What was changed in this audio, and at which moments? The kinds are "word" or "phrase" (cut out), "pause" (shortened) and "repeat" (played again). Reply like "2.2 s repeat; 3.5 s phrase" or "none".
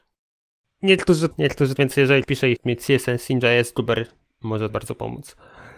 1.3 s word; 1.8 s word; 2.2 s word; 2.6 s word; 4.7 s word